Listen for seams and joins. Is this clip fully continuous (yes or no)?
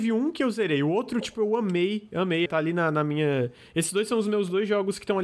no